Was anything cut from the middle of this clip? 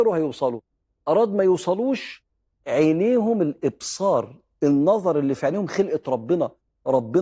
no; 0 cuts

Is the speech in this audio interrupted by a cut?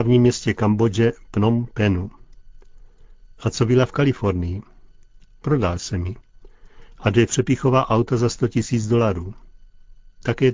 no; 0 cuts

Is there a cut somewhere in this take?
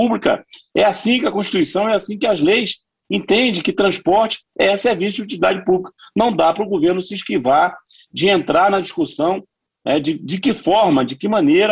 no; 0 cuts

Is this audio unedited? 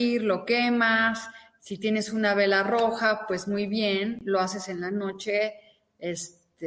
yes; 0 cuts

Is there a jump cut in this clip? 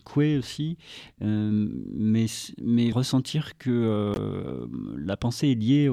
yes; 1 cut; at 2.9 s

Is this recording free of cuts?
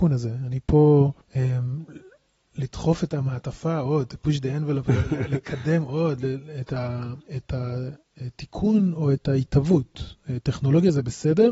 no; 2 cuts; at 1.2 s, 7.3 s

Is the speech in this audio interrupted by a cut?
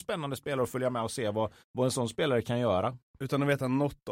yes; 2 cuts; at 1.6 s, 3.1 s

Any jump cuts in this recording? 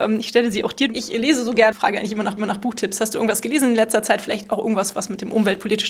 yes; 2 cuts; at 1.7 s, 2.4 s

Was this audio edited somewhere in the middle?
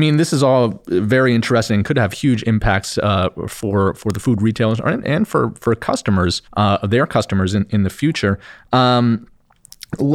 yes; 1 cut; at 6.5 s

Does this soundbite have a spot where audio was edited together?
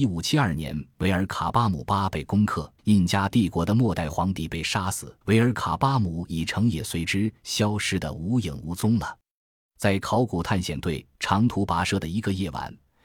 yes; 2 cuts; at 2.8 s, 5.2 s

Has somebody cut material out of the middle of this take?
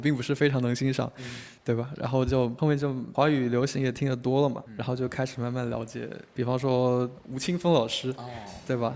yes; 1 cut; at 1.6 s

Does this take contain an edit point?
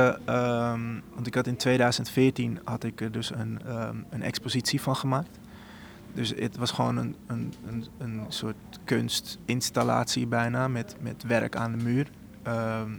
no; 0 cuts

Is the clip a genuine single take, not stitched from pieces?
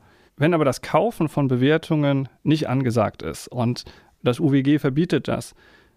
yes; 0 cuts

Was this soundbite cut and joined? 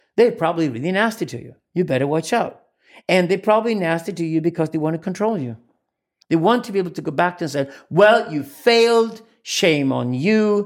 no; 0 cuts

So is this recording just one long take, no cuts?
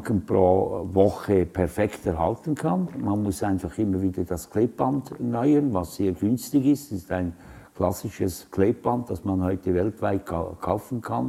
yes; 0 cuts

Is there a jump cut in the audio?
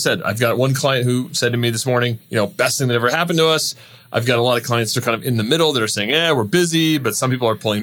no; 0 cuts

